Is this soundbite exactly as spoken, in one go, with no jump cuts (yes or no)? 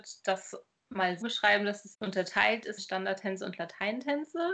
no